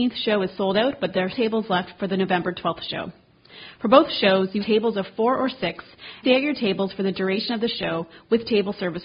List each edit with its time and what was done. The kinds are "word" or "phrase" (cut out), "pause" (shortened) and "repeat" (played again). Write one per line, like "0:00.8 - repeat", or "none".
0:01.3 - word
0:04.6 - phrase
0:06.2 - phrase